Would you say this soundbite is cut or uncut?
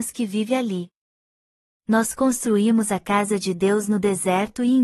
uncut